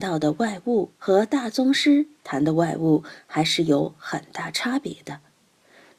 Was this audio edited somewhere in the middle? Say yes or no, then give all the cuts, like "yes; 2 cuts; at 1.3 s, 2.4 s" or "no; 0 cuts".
yes; 1 cut; at 0.9 s